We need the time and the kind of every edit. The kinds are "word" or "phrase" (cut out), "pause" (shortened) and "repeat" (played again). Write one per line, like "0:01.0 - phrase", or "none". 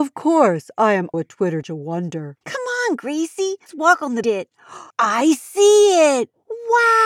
0:01.1 - word
0:01.6 - phrase
0:02.4 - pause
0:03.7 - word
0:04.2 - phrase
0:04.9 - pause